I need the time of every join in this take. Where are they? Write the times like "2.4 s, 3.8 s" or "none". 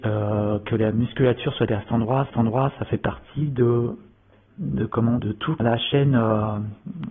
1.7 s, 2.3 s, 4.5 s, 5.2 s, 5.6 s